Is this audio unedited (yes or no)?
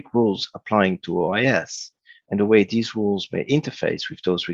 yes